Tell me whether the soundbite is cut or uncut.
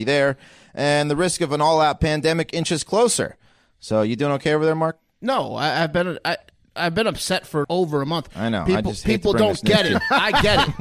cut